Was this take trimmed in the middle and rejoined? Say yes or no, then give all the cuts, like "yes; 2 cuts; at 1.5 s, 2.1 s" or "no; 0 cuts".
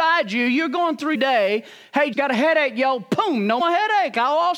yes; 3 cuts; at 1.1 s, 2.1 s, 3.6 s